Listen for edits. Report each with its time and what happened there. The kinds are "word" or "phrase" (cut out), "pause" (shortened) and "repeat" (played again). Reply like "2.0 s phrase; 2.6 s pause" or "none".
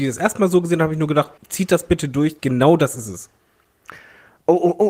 1.4 s pause; 2.4 s pause